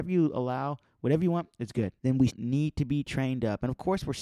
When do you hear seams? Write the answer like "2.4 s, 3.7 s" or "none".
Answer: 2.0 s, 2.3 s